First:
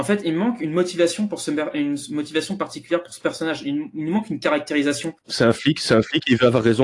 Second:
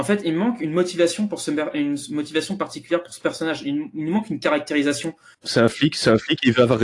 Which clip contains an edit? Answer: first; 1 cut; at 5.2 s

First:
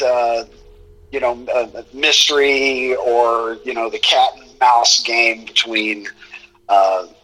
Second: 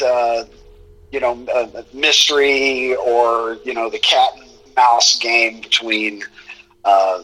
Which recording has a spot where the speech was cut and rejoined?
first; 1 cut; at 4.5 s

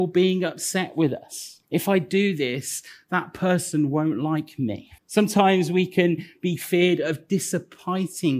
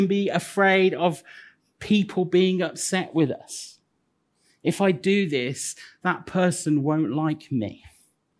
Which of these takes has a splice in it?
first; 2 cuts; at 1.6 s, 5.0 s

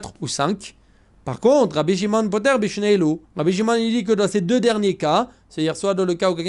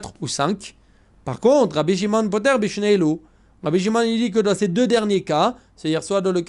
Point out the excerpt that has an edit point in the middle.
first; 1 cut; at 3.2 s

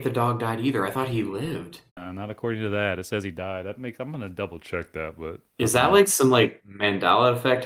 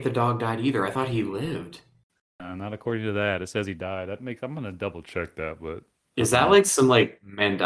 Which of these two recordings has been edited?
first; 2 cuts; at 1.9 s, 5.5 s

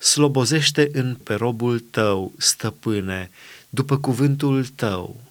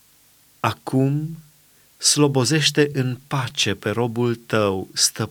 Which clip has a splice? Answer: first; 1 cut; at 1.2 s

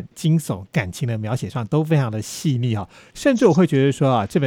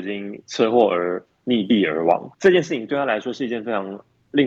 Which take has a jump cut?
second; 1 cut; at 2.3 s

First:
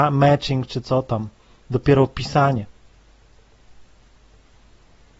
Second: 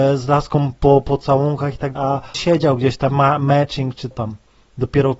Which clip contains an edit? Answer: second; 4 cuts; at 2.0 s, 2.3 s, 3.1 s, 4.1 s

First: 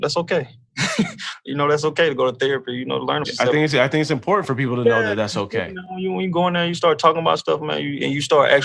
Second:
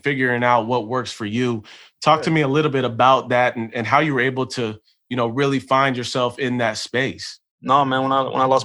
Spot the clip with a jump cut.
first; 1 cut; at 3.2 s

